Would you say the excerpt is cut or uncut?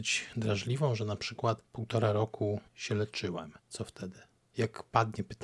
cut